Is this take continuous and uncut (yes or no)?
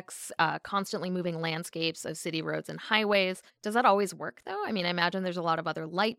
no